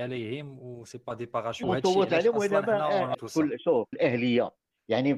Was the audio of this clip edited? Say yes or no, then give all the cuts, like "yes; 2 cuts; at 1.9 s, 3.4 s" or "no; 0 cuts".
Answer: yes; 3 cuts; at 1.6 s, 3.1 s, 3.9 s